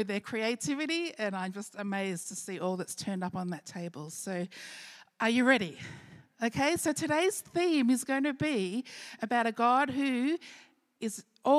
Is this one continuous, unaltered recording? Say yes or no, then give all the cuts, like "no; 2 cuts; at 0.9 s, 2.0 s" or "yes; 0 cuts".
yes; 0 cuts